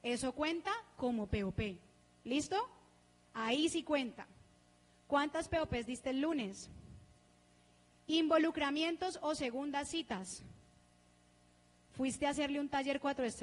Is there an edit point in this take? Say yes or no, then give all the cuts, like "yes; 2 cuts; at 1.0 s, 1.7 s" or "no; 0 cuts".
no; 0 cuts